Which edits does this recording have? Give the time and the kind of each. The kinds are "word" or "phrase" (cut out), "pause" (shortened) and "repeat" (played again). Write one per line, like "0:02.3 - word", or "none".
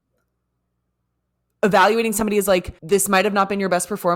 0:02.8 - pause